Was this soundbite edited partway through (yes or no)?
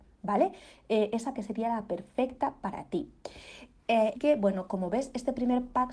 yes